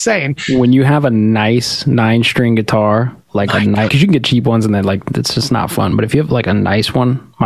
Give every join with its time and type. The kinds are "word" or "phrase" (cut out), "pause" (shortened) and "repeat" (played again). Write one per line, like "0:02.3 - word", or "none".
0:03.9 - word